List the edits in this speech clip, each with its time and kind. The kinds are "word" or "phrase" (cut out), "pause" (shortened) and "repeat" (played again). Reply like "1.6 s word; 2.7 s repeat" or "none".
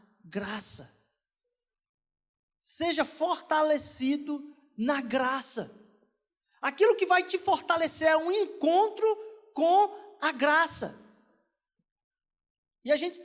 none